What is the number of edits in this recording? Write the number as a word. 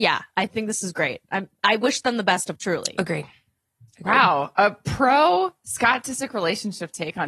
one